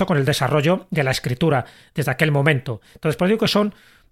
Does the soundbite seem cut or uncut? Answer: uncut